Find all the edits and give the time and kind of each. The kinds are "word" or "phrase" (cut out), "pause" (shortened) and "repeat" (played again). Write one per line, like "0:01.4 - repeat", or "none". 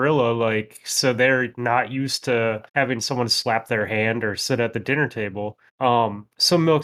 0:02.7 - pause
0:05.7 - pause